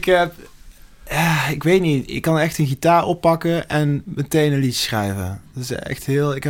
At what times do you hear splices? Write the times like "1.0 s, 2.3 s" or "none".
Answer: none